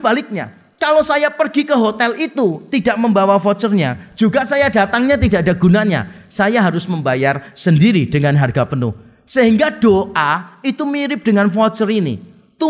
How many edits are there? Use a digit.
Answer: 0